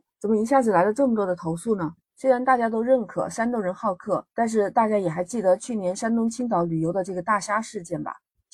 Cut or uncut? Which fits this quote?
cut